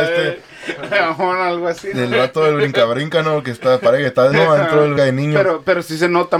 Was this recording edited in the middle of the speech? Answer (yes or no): yes